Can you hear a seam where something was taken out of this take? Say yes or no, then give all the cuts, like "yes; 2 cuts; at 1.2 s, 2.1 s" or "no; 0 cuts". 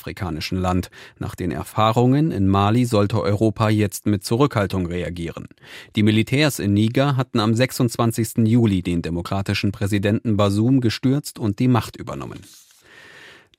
no; 0 cuts